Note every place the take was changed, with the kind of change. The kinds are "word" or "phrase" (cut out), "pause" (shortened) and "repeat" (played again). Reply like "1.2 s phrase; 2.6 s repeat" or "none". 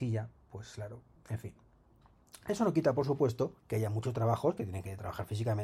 1.2 s pause; 3.6 s pause